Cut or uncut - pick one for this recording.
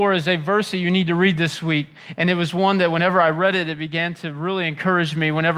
uncut